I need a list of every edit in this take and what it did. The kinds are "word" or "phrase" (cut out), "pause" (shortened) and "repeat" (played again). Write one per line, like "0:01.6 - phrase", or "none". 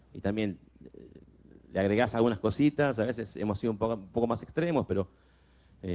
none